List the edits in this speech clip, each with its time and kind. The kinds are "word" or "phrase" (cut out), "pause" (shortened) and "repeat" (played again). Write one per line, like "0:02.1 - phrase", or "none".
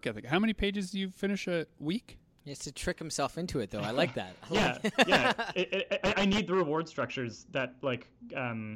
none